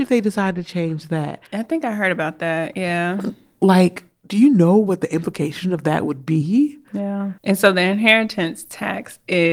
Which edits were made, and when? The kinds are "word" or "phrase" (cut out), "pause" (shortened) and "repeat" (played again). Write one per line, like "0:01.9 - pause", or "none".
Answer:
0:01.5 - pause
0:07.4 - pause

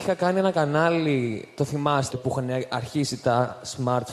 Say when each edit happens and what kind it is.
0:02.1 - phrase

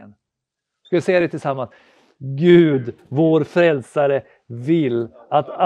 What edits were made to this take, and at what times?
none

